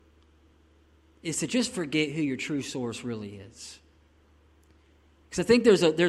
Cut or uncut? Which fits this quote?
uncut